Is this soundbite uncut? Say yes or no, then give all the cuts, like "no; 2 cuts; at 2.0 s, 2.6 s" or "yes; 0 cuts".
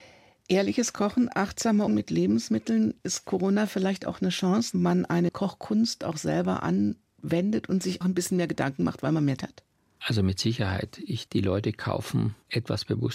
no; 6 cuts; at 1.9 s, 4.7 s, 5.3 s, 8.0 s, 9.4 s, 11.3 s